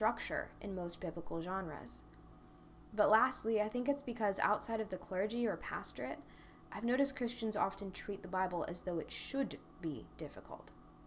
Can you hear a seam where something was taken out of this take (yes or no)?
no